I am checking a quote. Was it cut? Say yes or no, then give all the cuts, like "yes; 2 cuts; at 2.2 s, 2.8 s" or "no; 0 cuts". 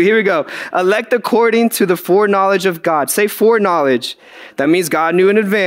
no; 0 cuts